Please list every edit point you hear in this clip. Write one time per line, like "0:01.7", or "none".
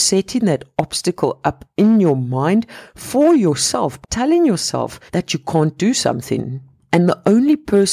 0:04.0
0:05.1